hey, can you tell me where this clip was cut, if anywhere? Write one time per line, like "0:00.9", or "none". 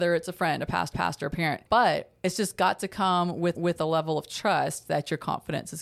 0:00.9
0:01.7
0:03.6